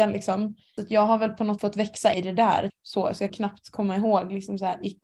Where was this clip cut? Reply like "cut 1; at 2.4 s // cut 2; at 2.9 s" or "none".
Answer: cut 1; at 1.6 s // cut 2; at 2.1 s // cut 3; at 2.7 s // cut 4; at 3.3 s